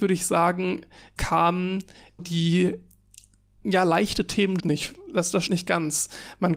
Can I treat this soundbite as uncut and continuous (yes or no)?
no